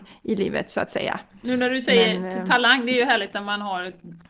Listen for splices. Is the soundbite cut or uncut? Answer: uncut